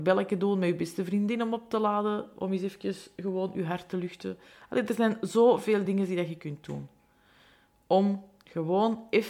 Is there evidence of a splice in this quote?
no; 0 cuts

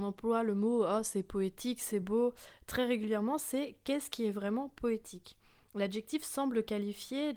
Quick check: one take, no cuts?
yes; 0 cuts

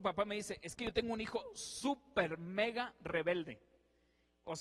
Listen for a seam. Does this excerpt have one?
no; 0 cuts

